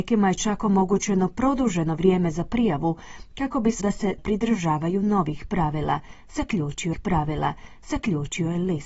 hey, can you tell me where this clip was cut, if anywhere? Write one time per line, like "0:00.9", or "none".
0:03.8
0:04.2
0:06.9